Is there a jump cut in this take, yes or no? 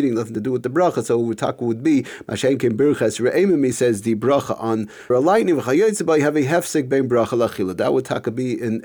yes